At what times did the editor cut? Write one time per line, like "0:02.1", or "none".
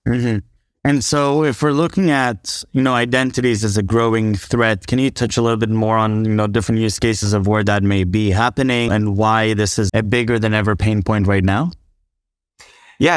0:08.9
0:09.9